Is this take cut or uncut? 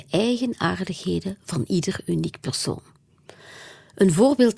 uncut